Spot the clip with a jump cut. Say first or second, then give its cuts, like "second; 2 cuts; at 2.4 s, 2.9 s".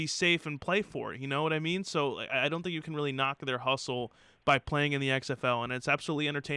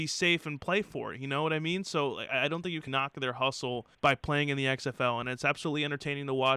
second; 2 cuts; at 2.9 s, 3.9 s